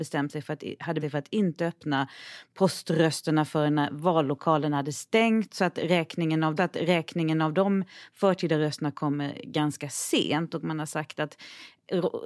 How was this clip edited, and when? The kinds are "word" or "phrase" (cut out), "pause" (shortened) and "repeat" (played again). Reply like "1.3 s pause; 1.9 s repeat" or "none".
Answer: 1.0 s word; 6.6 s repeat